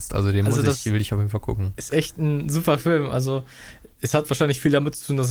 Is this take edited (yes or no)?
no